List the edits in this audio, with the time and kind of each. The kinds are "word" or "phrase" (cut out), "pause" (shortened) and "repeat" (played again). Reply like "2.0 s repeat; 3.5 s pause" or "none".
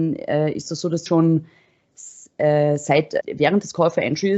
1.1 s word; 3.2 s word

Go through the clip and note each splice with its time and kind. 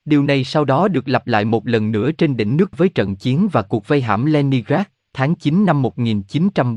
2.7 s word

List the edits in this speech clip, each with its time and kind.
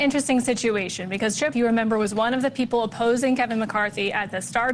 1.5 s phrase

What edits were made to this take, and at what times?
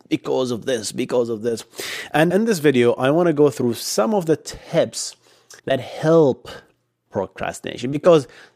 2.3 s word; 5.6 s pause; 7.1 s phrase

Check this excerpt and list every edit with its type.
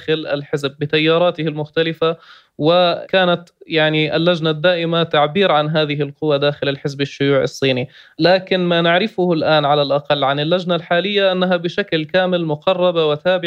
none

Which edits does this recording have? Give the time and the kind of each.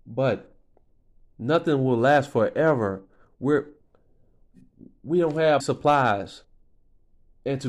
5.6 s word

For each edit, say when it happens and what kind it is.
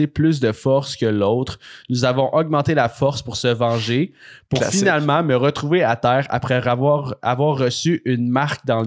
none

